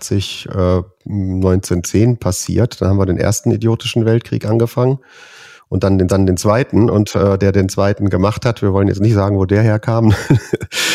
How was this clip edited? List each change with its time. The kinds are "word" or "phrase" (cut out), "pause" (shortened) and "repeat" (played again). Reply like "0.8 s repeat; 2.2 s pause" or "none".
6.1 s repeat; 7.4 s word